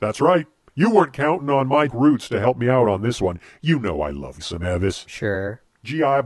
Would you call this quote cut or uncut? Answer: cut